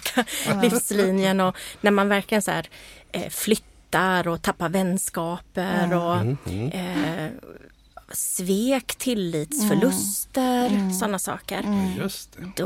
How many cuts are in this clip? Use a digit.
0